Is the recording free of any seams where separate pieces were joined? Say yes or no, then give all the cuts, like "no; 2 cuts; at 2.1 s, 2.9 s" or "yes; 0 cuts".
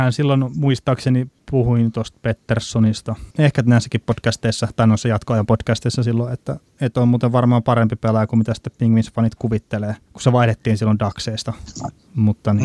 no; 1 cut; at 3.3 s